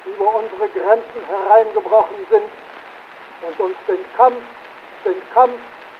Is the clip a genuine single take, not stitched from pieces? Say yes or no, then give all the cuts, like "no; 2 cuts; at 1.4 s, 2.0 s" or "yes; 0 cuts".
no; 1 cut; at 5.0 s